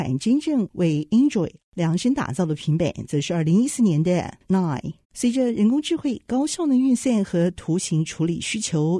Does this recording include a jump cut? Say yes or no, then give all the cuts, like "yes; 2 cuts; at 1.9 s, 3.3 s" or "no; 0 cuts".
yes; 2 cuts; at 4.4 s, 5.0 s